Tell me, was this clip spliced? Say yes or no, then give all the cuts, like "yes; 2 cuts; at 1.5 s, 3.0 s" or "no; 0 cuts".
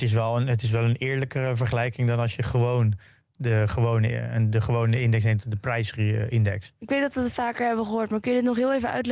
no; 0 cuts